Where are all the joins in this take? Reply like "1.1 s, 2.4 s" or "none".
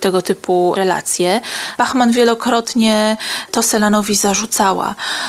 none